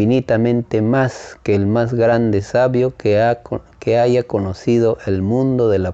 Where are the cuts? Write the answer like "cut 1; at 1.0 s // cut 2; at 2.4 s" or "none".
none